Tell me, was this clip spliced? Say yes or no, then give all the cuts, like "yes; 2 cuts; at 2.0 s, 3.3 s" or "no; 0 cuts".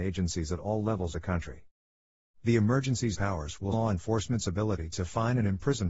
yes; 3 cuts; at 1.1 s, 3.1 s, 3.7 s